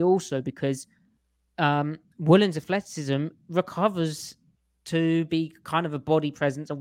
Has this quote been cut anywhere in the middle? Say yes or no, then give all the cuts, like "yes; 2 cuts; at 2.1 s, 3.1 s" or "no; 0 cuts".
no; 0 cuts